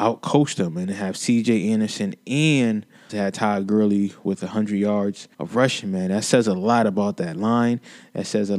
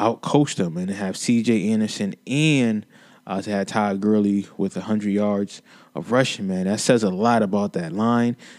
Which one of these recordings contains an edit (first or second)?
first